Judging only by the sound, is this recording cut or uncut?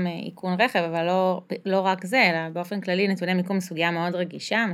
uncut